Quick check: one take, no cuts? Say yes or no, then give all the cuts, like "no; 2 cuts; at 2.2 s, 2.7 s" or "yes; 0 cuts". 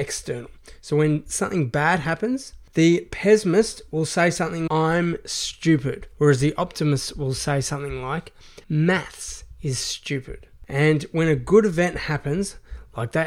no; 3 cuts; at 4.7 s, 6.1 s, 8.6 s